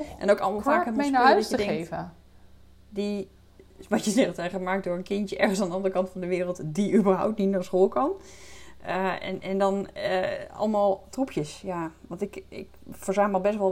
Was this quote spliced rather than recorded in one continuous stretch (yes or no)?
no